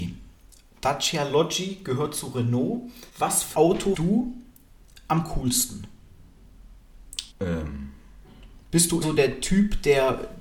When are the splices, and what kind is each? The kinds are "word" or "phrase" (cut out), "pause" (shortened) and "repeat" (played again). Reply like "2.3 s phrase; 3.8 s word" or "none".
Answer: 3.1 s pause; 3.5 s word; 3.9 s word; 7.3 s pause; 9.0 s word

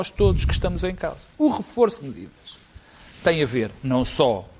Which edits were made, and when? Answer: 1.3 s pause; 2.0 s word

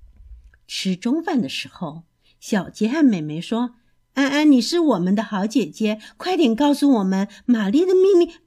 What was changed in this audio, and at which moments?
none

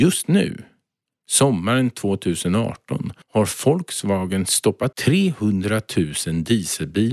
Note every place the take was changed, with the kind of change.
3.2 s pause; 4.9 s word

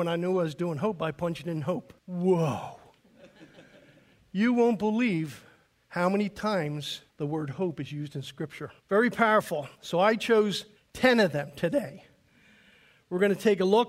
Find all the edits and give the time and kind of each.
2.0 s pause; 5.7 s pause; 7.1 s pause; 8.8 s pause; 9.7 s pause; 10.8 s pause

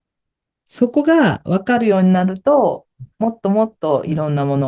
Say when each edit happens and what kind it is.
3.1 s pause

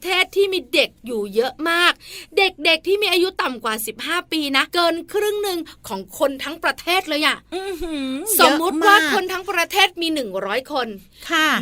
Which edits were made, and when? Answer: 4.7 s pause

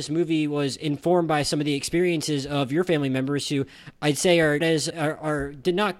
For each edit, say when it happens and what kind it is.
4.6 s word; 4.9 s word

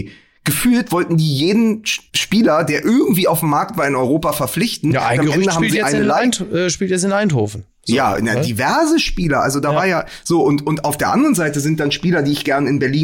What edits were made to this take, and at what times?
2.1 s pause

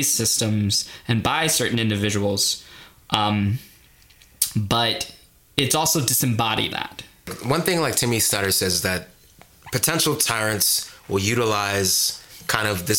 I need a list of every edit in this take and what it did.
6.7 s word

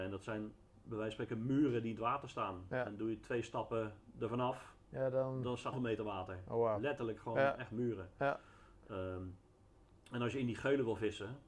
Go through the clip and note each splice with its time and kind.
5.7 s word

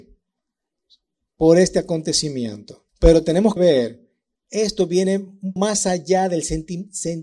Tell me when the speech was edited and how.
2.9 s pause; 3.6 s word; 4.4 s word; 5.6 s word

